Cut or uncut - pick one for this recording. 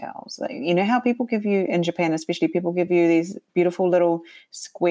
uncut